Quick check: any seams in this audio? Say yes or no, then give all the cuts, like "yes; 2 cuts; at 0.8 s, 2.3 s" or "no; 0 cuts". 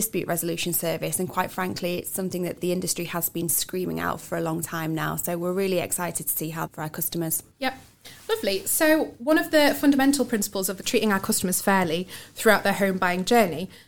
yes; 5 cuts; at 2.6 s, 4.2 s, 6.7 s, 7.5 s, 10.8 s